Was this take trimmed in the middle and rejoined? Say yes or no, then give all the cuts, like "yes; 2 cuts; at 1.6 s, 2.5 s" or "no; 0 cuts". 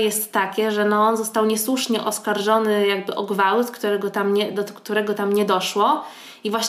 no; 0 cuts